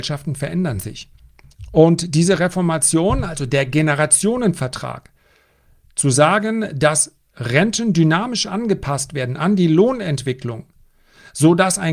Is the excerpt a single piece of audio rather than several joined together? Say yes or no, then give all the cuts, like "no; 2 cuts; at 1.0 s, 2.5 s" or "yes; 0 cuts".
yes; 0 cuts